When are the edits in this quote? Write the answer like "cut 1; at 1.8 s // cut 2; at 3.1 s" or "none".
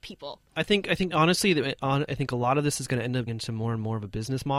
cut 1; at 1.1 s // cut 2; at 2.1 s // cut 3; at 3.3 s